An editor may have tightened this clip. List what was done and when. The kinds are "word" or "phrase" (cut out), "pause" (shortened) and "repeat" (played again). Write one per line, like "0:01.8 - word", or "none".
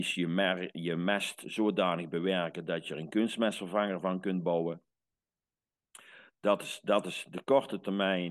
none